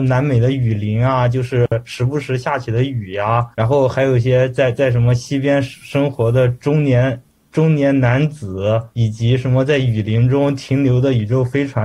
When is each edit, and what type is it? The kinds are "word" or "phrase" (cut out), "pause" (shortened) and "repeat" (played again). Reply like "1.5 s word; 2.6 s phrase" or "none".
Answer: 3.5 s pause; 8.9 s pause